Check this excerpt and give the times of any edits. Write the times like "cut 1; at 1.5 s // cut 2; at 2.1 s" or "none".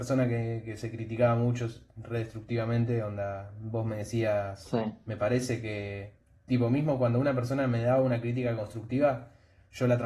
none